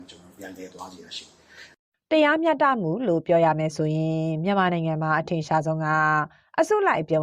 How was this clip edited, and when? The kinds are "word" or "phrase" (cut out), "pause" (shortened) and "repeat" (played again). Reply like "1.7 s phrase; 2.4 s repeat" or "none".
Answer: none